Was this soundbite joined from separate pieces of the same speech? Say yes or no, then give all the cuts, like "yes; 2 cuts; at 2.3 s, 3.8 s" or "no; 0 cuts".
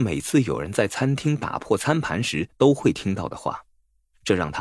no; 0 cuts